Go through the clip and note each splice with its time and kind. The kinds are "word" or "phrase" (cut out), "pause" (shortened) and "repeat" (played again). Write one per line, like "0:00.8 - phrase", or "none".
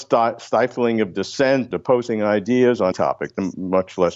0:01.7 - word
0:02.9 - word